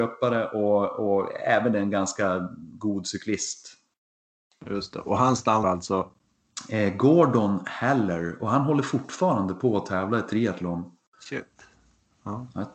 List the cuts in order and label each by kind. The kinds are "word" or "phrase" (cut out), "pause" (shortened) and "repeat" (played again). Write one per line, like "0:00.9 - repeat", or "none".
0:05.6 - word